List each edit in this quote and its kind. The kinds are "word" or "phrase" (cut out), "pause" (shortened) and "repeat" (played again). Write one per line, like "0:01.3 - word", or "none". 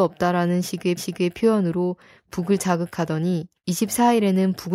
0:01.0 - repeat
0:03.6 - pause